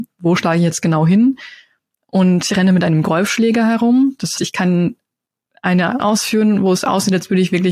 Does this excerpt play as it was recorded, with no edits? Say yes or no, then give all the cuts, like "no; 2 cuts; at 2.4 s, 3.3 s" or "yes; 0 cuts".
no; 3 cuts; at 2.5 s, 4.4 s, 6.0 s